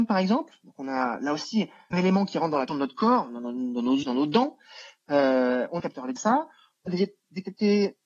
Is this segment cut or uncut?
cut